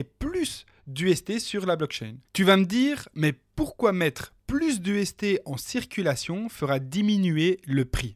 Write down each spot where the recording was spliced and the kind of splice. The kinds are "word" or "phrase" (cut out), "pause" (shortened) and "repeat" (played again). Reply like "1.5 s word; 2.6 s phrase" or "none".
2.3 s pause